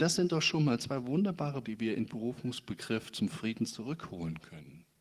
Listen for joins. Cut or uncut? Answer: cut